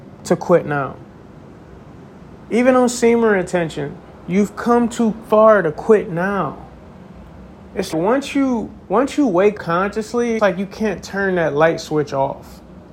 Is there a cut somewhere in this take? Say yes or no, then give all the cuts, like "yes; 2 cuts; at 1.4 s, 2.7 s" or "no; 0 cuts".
yes; 5 cuts; at 2.4 s, 7.9 s, 8.8 s, 9.6 s, 10.4 s